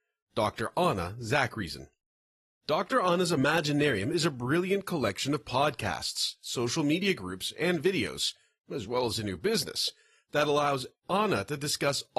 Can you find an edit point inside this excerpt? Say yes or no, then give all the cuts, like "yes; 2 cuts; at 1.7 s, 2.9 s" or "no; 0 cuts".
no; 0 cuts